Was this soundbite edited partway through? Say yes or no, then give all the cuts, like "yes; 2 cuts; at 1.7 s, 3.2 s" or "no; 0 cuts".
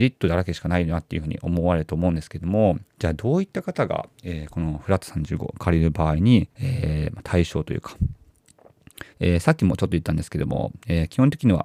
yes; 3 cuts; at 2.9 s, 6.5 s, 9.1 s